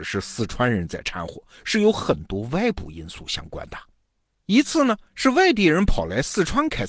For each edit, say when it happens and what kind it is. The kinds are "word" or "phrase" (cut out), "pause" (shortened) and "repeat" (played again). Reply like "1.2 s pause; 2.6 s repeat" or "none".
none